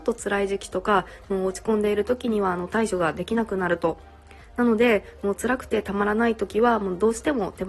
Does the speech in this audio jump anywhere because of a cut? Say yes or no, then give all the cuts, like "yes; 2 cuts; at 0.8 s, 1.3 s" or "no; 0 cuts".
no; 0 cuts